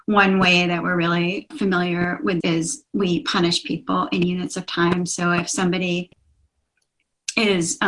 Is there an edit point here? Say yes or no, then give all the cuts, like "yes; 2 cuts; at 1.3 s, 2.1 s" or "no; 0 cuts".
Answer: yes; 2 cuts; at 1.5 s, 2.4 s